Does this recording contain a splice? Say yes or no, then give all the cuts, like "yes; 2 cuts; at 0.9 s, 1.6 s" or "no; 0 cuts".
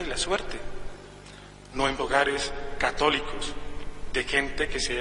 yes; 1 cut; at 2.0 s